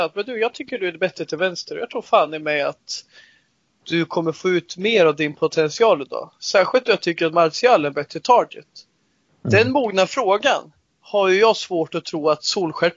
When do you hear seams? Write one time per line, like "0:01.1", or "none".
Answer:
none